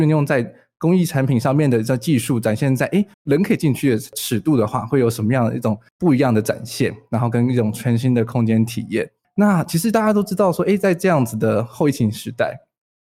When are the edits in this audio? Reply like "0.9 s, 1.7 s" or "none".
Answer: 3.1 s, 9.2 s